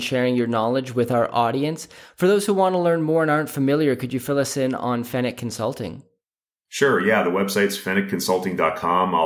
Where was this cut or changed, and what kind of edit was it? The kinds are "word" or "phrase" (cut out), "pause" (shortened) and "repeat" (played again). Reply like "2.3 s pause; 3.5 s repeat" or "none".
none